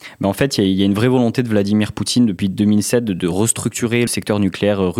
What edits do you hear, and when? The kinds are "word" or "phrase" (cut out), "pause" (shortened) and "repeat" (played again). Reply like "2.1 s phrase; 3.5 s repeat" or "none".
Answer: 4.1 s word